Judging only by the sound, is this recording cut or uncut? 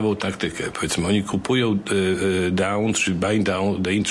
uncut